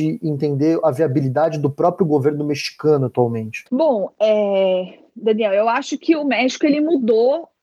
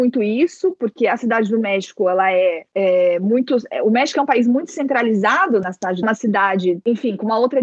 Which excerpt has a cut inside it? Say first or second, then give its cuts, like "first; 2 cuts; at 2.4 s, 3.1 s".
second; 3 cuts; at 2.7 s, 5.6 s, 6.0 s